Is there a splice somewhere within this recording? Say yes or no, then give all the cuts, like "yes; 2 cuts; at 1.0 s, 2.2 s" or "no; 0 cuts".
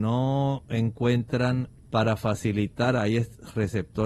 yes; 1 cut; at 1.9 s